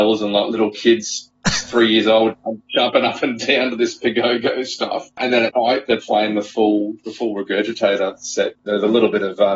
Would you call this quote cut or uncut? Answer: uncut